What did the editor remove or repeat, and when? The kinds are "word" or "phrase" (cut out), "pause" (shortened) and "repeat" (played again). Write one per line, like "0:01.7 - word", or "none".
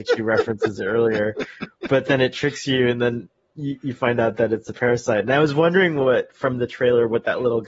none